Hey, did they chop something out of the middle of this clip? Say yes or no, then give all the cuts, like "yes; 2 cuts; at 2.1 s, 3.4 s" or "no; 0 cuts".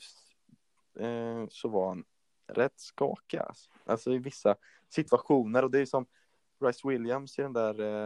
no; 0 cuts